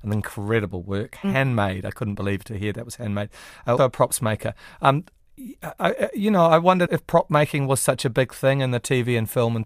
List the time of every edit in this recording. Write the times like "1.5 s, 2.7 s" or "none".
3.8 s, 6.9 s